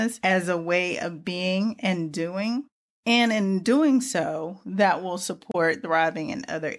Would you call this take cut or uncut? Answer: uncut